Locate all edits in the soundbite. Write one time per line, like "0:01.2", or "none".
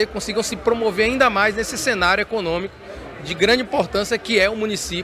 none